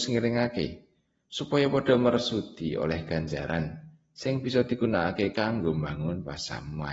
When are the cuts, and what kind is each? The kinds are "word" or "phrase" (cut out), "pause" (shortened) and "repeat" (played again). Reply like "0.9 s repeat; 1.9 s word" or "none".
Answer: none